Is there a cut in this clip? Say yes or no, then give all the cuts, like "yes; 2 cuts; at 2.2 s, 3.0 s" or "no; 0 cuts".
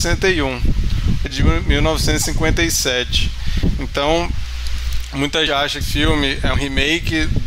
yes; 4 cuts; at 1.3 s, 5.5 s, 5.8 s, 6.5 s